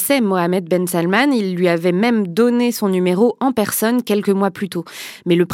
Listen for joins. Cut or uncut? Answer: uncut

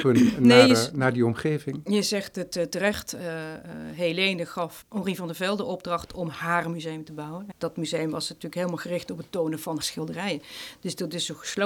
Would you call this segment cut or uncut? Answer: cut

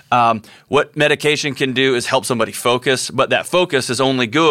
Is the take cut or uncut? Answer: uncut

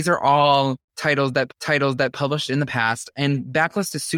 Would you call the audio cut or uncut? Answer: cut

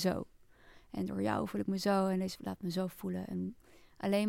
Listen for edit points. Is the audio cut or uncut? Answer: cut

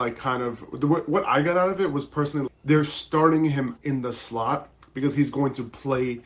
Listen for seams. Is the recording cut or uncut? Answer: cut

